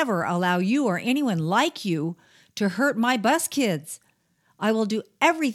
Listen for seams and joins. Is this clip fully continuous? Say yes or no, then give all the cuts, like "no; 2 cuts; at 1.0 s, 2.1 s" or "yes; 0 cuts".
yes; 0 cuts